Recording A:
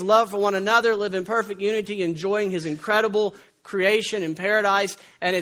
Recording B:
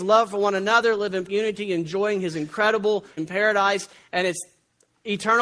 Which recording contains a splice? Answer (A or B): B